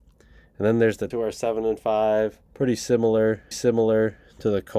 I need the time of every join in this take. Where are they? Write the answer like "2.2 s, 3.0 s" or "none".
1.1 s, 2.5 s, 3.5 s